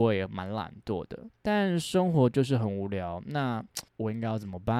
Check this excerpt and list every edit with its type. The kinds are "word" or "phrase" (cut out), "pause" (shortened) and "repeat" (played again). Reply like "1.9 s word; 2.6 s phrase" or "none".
3.9 s pause